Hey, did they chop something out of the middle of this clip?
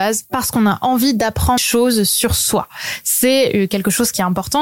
yes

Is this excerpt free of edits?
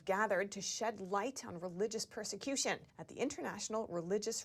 no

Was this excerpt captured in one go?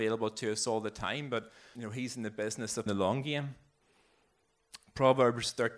no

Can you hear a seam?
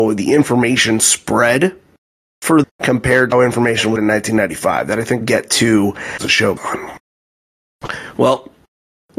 yes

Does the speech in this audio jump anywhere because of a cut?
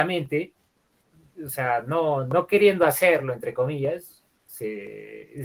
no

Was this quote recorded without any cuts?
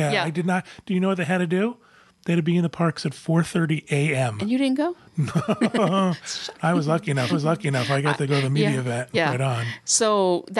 no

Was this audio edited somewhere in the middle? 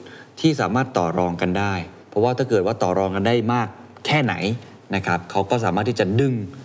yes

